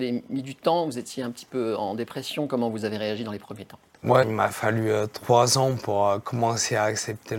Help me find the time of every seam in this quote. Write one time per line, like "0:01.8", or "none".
0:04.2